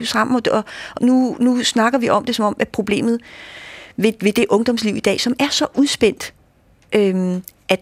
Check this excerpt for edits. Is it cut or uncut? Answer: cut